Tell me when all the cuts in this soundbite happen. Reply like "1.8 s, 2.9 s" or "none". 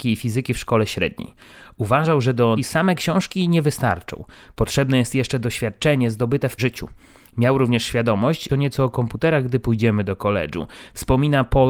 2.6 s, 6.6 s, 8.5 s